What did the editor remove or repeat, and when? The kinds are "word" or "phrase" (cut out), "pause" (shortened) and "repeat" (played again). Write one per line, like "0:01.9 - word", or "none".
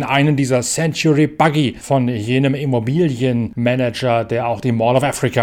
none